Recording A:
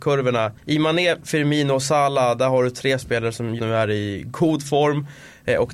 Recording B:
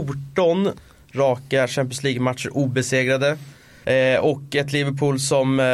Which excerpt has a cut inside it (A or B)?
A